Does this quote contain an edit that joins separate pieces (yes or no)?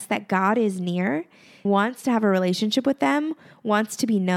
yes